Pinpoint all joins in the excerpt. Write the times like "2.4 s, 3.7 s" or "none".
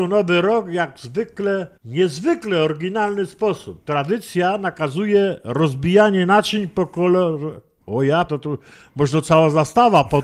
1.7 s, 8.3 s